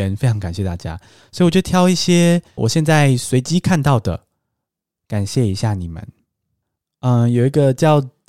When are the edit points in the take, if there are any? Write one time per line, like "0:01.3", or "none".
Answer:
0:02.6